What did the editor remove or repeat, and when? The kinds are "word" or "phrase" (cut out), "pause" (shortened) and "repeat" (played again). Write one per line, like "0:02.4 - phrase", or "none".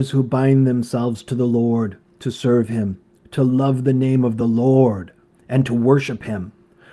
none